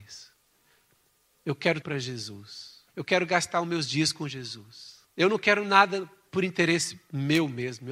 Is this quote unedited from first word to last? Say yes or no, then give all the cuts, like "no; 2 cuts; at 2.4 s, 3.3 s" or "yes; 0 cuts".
no; 3 cuts; at 1.8 s, 2.9 s, 5.1 s